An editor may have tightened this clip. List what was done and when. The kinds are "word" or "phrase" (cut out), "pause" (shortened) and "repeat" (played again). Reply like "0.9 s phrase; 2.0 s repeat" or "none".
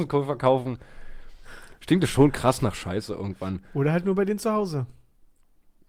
none